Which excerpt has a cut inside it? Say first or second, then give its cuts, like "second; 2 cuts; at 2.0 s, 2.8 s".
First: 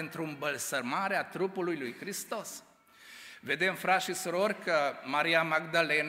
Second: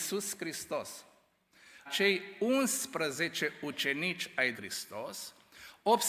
second; 2 cuts; at 1.9 s, 4.5 s